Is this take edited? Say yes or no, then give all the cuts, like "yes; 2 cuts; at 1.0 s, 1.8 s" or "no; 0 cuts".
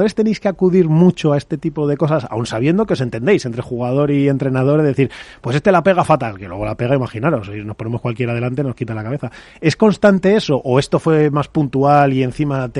no; 0 cuts